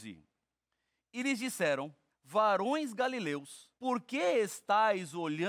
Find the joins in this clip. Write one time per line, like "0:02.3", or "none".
0:02.1
0:03.8